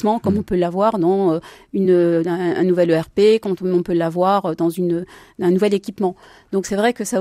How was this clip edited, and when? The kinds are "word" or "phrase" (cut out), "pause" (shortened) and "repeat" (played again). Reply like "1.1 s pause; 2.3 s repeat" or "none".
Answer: none